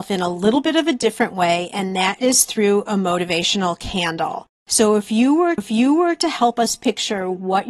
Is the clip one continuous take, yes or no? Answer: no